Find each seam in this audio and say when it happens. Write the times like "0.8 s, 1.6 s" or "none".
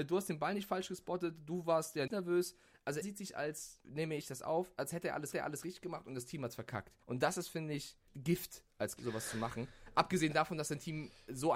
2.1 s, 3.0 s, 3.8 s, 5.3 s, 7.0 s, 8.1 s, 9.0 s